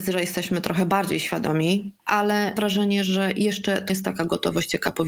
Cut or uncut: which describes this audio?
cut